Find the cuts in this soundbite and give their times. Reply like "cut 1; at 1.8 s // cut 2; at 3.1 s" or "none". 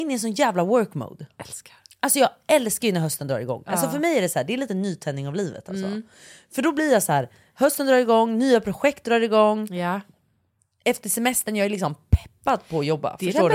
none